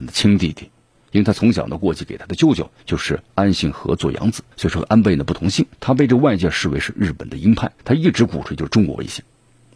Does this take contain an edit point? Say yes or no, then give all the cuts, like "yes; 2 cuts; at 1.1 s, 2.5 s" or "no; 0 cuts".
yes; 4 cuts; at 2.8 s, 4.5 s, 5.7 s, 7.8 s